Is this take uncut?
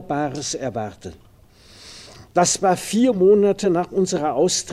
yes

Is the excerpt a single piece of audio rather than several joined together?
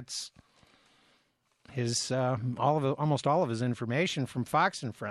yes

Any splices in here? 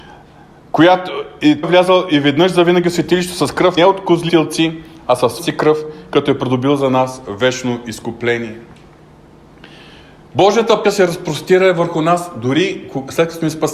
yes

